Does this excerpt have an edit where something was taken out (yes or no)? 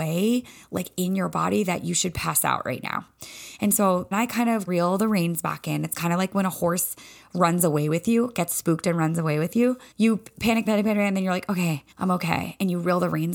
yes